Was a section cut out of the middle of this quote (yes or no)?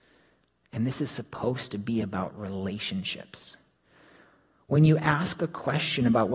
no